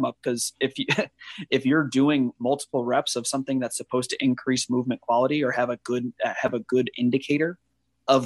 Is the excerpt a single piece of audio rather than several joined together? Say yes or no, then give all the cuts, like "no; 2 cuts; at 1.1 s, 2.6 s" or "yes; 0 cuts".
yes; 0 cuts